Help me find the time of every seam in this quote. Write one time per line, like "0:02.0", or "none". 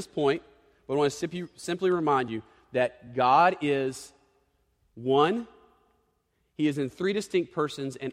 none